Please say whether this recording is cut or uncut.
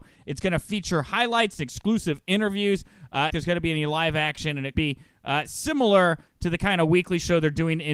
cut